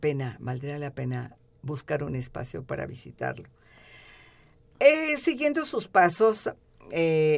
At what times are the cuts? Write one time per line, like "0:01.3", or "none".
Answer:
none